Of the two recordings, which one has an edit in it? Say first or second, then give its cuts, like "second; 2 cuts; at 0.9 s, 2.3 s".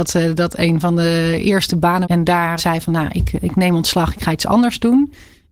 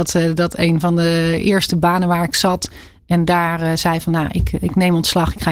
first; 2 cuts; at 2.0 s, 2.6 s